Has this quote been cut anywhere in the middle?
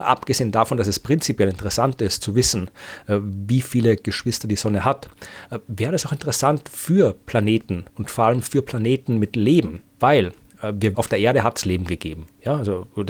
yes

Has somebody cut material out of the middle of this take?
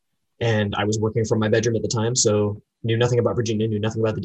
no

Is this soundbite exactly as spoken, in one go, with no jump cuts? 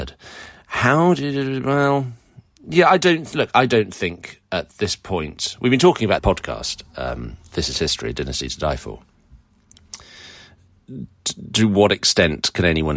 no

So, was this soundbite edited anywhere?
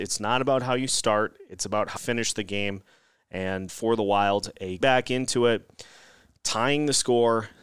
yes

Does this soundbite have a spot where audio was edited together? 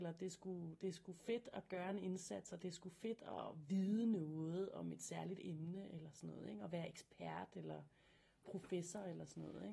no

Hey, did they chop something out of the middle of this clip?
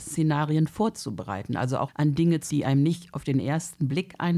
yes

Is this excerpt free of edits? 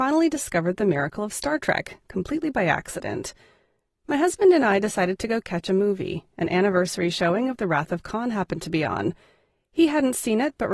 yes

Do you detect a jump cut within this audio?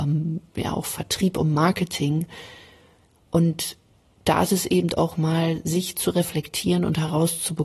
no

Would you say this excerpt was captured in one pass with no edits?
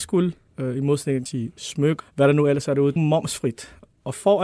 no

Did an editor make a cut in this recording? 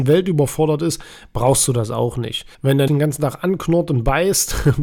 yes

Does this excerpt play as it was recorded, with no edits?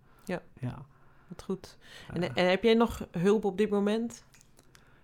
yes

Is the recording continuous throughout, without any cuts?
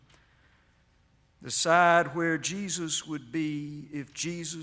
yes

